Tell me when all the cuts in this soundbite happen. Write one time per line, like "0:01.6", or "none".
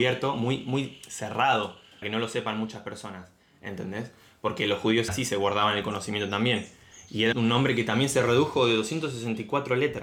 0:02.0
0:05.1
0:07.3